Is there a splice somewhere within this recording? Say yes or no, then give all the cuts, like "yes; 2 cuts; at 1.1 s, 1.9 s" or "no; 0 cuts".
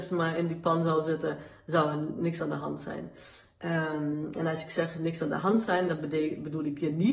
no; 0 cuts